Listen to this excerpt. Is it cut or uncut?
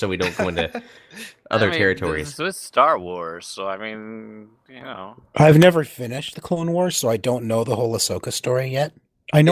uncut